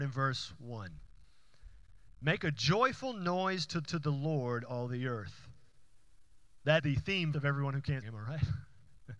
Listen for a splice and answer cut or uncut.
cut